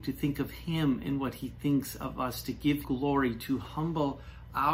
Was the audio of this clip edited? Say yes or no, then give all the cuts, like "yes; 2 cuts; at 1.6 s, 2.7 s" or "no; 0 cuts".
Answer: yes; 1 cut; at 2.8 s